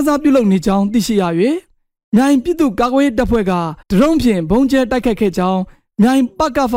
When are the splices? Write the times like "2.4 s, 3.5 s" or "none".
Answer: 3.8 s